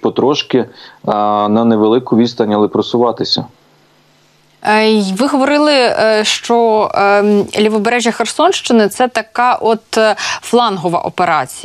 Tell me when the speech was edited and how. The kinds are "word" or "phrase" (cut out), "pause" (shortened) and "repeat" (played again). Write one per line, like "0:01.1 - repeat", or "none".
none